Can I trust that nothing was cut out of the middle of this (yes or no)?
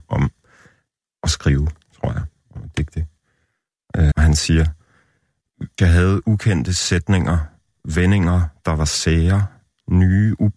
no